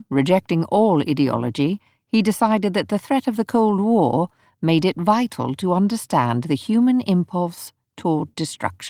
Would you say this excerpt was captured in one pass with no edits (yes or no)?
yes